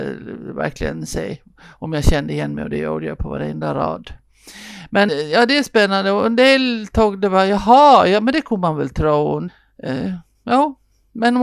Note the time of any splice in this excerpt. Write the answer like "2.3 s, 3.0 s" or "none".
5.1 s